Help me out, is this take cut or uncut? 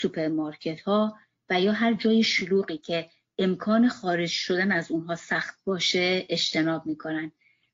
uncut